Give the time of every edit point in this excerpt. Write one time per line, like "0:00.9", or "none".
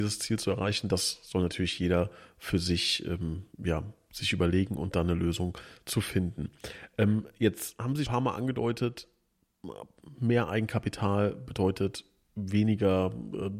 0:08.0